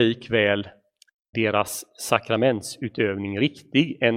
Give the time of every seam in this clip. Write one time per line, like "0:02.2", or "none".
0:01.3